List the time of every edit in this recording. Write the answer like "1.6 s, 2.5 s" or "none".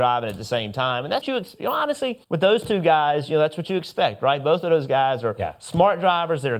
1.2 s, 2.2 s